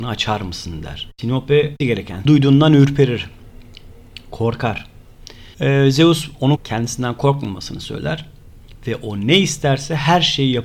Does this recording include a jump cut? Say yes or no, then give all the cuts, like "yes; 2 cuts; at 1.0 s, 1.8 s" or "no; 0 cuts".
yes; 4 cuts; at 1.8 s, 2.3 s, 5.5 s, 6.6 s